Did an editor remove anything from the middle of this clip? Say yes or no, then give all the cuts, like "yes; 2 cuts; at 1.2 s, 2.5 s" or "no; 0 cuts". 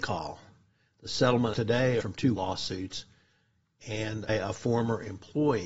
yes; 4 cuts; at 1.5 s, 2.0 s, 2.4 s, 4.3 s